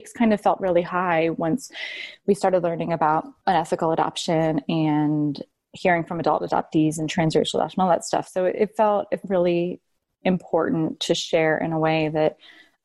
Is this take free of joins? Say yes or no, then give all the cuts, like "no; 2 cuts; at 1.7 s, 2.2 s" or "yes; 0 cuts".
no; 1 cut; at 9.2 s